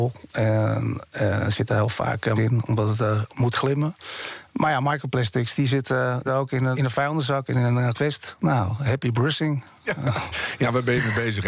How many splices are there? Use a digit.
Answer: 4